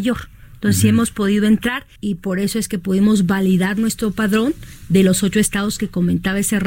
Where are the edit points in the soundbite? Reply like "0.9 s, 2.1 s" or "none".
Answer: 2.0 s